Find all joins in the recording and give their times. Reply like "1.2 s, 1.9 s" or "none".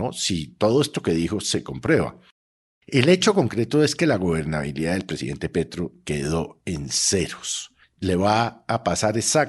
none